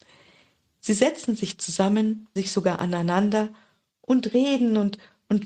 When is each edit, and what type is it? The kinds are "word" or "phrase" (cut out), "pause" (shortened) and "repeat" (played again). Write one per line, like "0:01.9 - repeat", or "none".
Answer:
0:02.4 - word